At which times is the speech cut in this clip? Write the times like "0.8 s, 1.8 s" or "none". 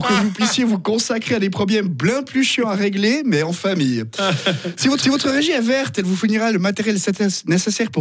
5.0 s